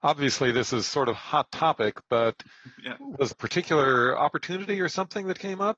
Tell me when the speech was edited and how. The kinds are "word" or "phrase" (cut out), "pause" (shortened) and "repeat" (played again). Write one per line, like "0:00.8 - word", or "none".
0:01.1 - word
0:03.3 - word